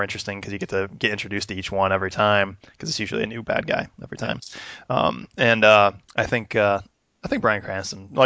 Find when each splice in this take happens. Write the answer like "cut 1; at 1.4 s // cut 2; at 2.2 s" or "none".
cut 1; at 6.0 s